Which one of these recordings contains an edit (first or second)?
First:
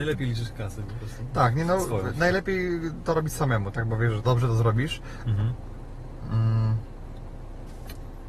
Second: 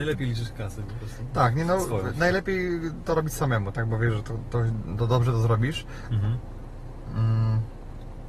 first